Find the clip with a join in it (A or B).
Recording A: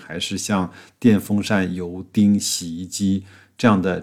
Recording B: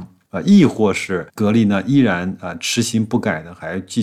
B